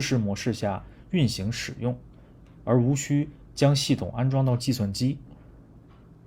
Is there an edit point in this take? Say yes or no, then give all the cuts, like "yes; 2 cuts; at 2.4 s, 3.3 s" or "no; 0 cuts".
no; 0 cuts